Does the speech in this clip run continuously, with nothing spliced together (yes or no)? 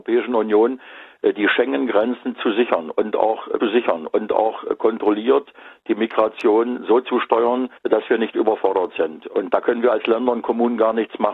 no